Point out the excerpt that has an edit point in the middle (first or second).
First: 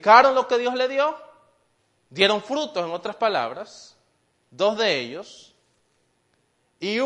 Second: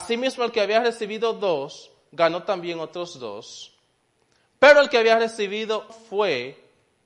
second